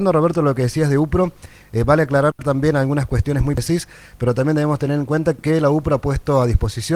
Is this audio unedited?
yes; 0 cuts

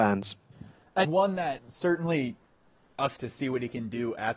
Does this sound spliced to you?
yes; 3 cuts; at 1.0 s, 1.6 s, 3.2 s

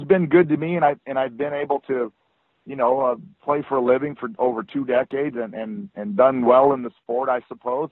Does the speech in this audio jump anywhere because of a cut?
no; 0 cuts

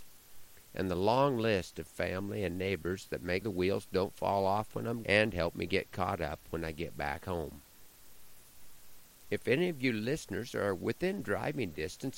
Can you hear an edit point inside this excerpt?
yes; 2 cuts; at 3.4 s, 5.0 s

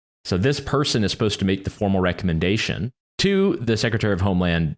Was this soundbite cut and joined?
yes; 1 cut; at 3.0 s

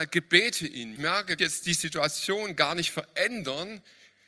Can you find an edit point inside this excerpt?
yes; 2 cuts; at 1.0 s, 1.4 s

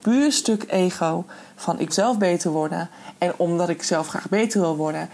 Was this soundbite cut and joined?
yes; 1 cut; at 1.9 s

